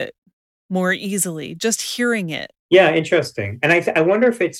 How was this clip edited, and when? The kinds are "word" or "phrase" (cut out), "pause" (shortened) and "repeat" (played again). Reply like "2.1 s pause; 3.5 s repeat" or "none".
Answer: 2.6 s pause

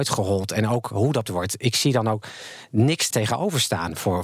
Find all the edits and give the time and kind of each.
1.3 s word; 3.1 s word

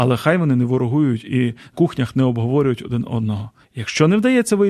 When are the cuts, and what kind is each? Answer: 1.7 s word; 3.6 s pause

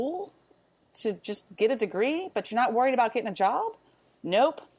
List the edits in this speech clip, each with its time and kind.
none

